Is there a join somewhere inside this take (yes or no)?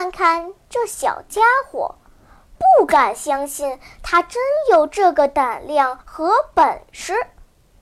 yes